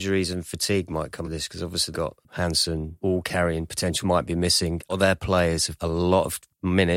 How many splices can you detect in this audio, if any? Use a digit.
7